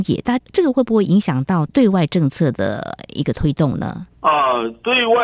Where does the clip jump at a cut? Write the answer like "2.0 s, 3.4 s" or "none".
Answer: 4.1 s